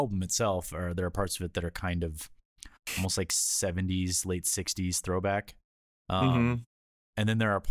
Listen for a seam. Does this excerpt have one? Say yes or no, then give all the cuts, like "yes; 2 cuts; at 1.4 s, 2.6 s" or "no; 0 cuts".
no; 0 cuts